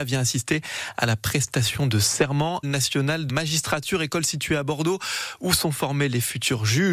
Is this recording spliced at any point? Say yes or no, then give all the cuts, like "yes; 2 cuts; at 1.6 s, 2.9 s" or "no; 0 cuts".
yes; 2 cuts; at 2.6 s, 3.3 s